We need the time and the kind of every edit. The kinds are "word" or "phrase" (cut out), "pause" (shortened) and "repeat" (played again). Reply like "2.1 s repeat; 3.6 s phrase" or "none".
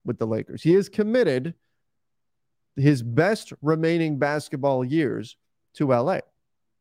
none

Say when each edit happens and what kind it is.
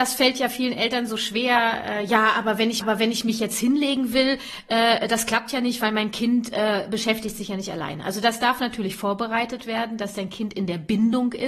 2.8 s repeat

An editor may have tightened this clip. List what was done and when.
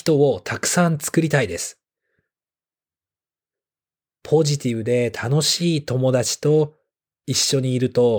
none

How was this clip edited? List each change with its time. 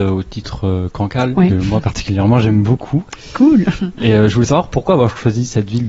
1.3 s word

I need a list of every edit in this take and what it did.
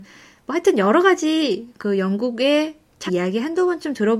3.1 s phrase

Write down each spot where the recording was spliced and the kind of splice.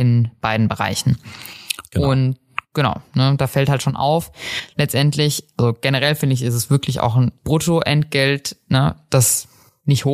7.4 s word

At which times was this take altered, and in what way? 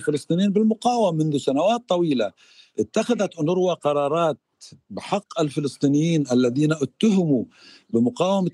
none

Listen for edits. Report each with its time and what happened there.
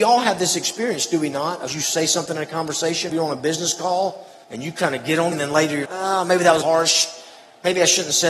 1.7 s word; 3.1 s word; 4.4 s pause; 5.3 s word; 5.8 s word; 6.6 s phrase

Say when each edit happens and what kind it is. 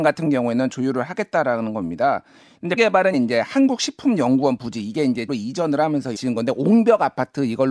2.8 s word; 3.1 s word; 5.3 s word; 6.1 s word

